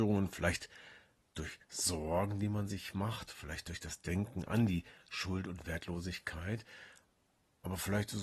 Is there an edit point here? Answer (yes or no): no